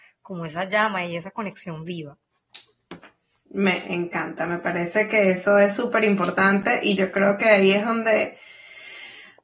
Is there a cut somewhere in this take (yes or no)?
no